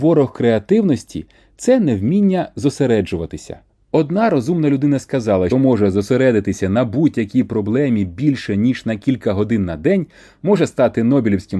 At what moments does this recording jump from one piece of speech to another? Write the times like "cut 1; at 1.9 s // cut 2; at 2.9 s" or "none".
cut 1; at 5.5 s